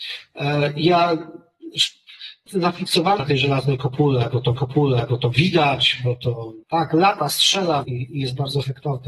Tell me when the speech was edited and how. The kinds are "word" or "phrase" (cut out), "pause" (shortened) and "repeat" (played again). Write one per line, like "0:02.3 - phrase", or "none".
0:02.5 - word
0:03.2 - word
0:04.6 - repeat
0:06.6 - pause
0:07.8 - word